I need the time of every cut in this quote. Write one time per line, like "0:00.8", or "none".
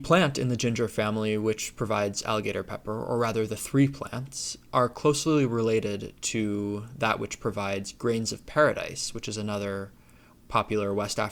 none